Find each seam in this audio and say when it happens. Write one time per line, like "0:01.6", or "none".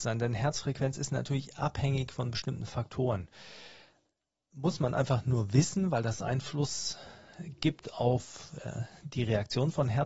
none

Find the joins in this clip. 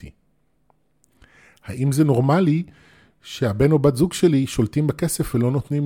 none

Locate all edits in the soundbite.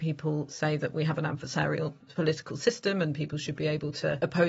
none

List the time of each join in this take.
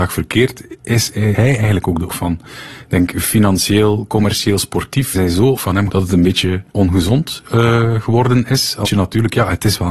0:01.3
0:02.1
0:05.1
0:05.6
0:05.9
0:06.7
0:08.8

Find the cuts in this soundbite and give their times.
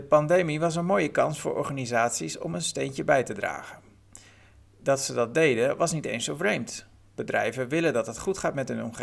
none

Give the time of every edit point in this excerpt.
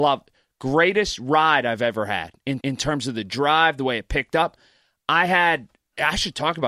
0:02.6

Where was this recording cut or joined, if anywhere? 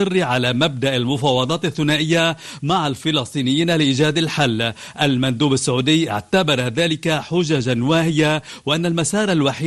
none

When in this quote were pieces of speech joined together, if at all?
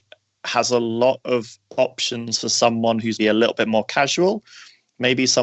0:03.2

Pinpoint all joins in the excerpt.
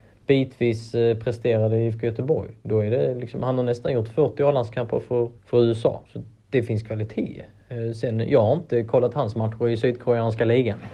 0:05.4
0:06.1

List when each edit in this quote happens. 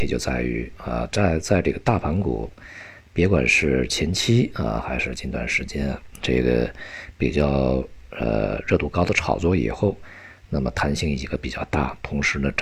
none

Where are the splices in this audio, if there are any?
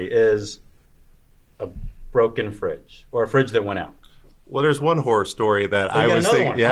none

